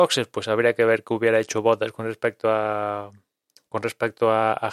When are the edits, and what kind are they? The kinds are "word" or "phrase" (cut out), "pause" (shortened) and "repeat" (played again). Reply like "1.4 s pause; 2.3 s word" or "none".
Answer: none